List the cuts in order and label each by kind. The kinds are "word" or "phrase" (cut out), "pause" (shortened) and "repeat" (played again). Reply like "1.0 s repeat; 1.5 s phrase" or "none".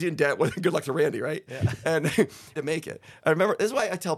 2.5 s phrase